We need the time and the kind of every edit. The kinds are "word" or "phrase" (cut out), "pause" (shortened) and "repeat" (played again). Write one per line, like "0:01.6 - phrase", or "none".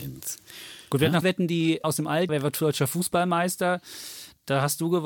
0:01.2 - word
0:01.8 - word
0:02.3 - word